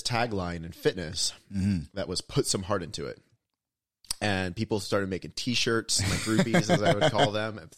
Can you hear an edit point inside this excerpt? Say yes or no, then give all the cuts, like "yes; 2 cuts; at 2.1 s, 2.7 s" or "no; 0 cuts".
no; 0 cuts